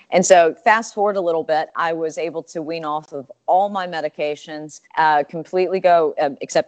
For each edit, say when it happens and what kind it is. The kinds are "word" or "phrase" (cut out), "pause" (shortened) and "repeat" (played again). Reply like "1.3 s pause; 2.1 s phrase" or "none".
4.9 s pause